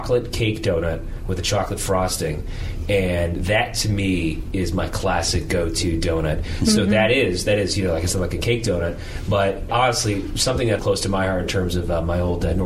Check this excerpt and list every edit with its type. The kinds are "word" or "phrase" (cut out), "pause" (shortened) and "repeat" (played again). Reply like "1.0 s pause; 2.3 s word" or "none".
9.7 s word; 10.8 s word